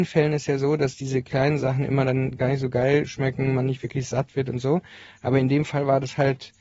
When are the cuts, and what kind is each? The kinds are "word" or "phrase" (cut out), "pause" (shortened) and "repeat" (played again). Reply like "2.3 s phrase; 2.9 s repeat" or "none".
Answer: none